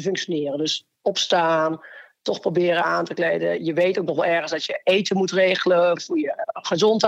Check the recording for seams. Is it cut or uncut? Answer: cut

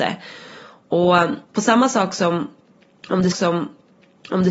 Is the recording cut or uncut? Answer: cut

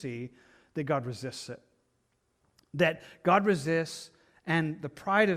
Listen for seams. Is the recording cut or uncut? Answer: uncut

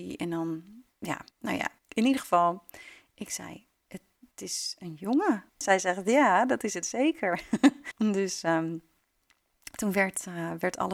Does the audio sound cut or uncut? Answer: cut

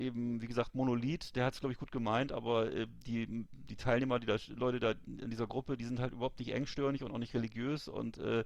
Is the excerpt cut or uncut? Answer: uncut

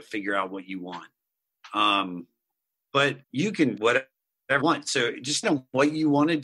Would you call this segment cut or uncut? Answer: cut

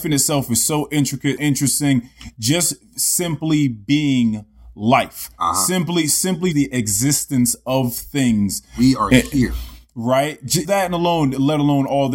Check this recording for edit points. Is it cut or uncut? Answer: cut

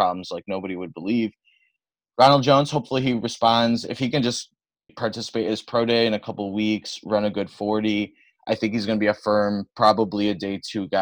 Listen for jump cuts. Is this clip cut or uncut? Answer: cut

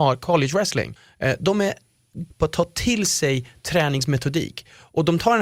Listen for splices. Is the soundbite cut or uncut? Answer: cut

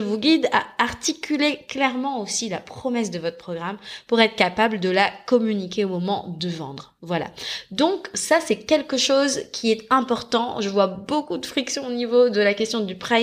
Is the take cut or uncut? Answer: uncut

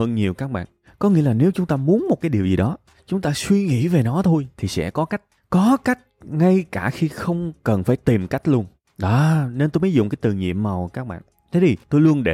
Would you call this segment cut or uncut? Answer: uncut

